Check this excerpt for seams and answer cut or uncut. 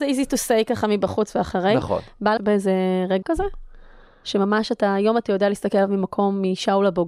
cut